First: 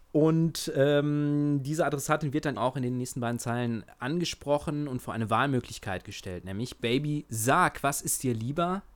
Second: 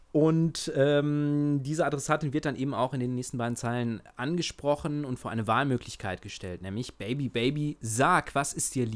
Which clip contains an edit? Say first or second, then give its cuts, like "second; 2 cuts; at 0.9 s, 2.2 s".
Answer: first; 2 cuts; at 2.6 s, 6.8 s